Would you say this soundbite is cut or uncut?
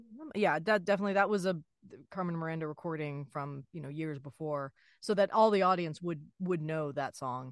uncut